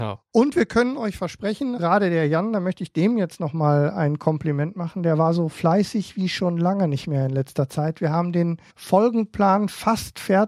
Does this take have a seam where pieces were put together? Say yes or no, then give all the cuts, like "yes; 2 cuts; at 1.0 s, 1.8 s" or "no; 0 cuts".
yes; 2 cuts; at 1.8 s, 8.7 s